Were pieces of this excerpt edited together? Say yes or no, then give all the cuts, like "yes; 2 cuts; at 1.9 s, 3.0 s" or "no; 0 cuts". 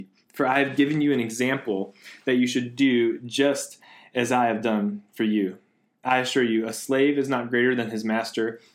no; 0 cuts